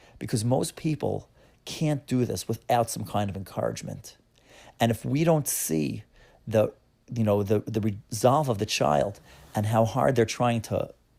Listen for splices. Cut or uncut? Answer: uncut